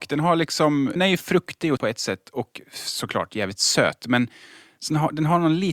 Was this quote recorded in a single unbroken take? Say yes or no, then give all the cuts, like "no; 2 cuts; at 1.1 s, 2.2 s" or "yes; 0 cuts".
no; 2 cuts; at 1.0 s, 1.8 s